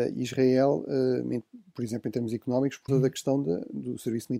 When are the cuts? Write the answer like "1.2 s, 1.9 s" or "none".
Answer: 2.9 s